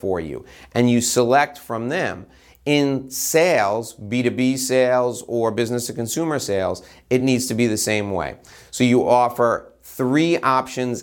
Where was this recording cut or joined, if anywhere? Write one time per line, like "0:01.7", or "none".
none

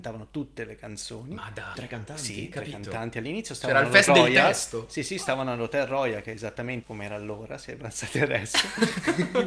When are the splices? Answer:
0:01.7
0:04.1
0:06.8

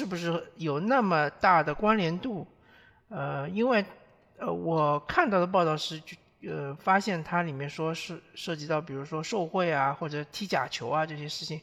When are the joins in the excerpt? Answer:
none

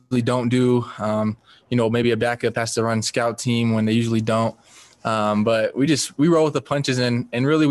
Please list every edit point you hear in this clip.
none

